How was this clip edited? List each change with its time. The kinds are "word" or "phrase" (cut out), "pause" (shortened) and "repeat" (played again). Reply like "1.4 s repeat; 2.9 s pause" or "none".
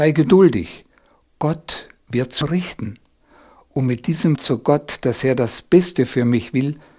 2.4 s word; 4.4 s word